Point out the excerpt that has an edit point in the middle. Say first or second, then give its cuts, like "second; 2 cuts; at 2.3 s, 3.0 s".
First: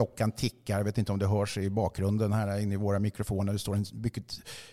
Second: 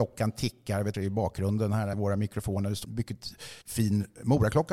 second; 4 cuts; at 0.9 s, 1.9 s, 2.8 s, 3.6 s